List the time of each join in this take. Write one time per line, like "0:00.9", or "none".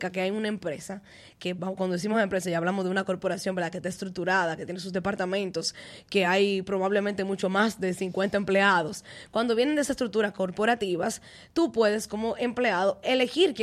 none